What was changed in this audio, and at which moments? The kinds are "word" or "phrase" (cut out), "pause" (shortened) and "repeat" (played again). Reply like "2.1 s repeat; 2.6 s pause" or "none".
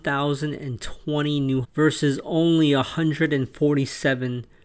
1.6 s word